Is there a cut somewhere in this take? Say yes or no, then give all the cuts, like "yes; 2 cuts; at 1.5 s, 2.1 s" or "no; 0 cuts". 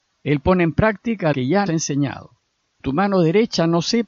yes; 3 cuts; at 1.3 s, 1.7 s, 2.8 s